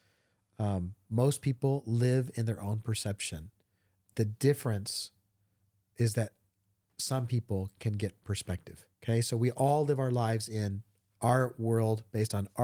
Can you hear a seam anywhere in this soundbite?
yes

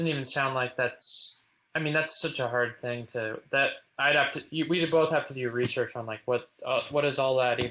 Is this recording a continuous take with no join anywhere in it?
yes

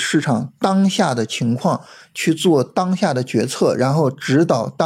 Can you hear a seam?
no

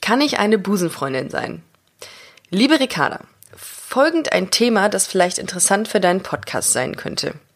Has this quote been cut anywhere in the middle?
no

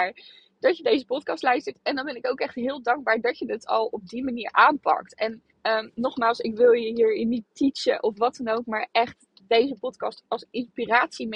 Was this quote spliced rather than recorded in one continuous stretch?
yes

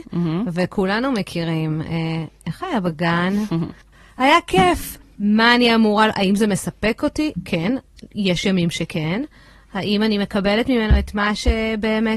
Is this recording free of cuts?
yes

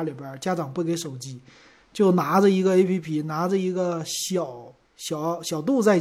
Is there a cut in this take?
no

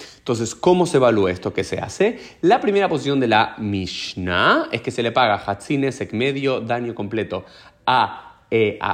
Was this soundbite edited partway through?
no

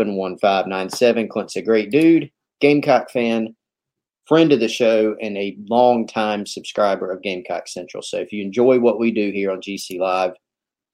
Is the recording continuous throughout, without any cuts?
yes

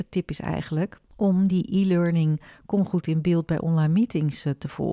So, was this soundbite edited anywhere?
no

